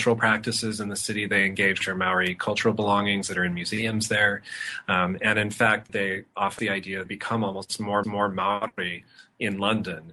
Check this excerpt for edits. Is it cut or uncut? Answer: cut